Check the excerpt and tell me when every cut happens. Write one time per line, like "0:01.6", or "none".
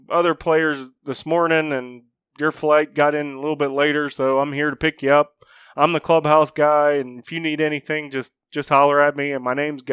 none

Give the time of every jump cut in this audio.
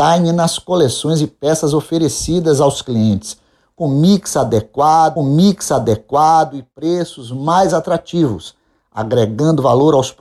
0:05.2

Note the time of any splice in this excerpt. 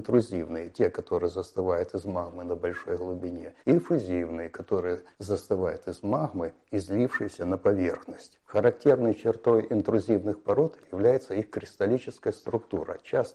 0:03.6
0:05.1
0:08.4

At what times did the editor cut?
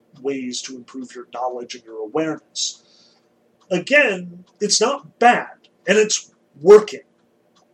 0:04.5

